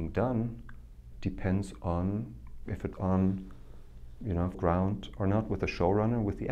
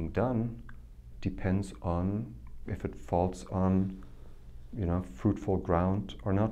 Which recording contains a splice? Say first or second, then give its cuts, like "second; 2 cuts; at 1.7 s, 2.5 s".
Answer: first; 2 cuts; at 2.9 s, 4.5 s